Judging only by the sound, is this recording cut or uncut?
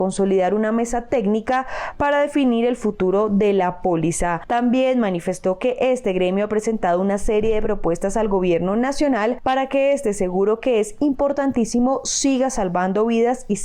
uncut